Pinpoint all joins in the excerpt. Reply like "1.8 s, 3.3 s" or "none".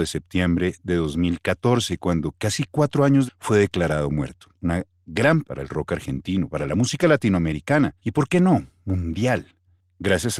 3.3 s, 4.5 s, 5.4 s, 8.0 s